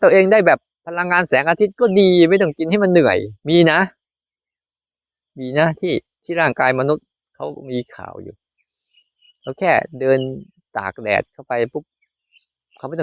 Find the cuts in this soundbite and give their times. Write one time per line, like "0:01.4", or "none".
0:03.4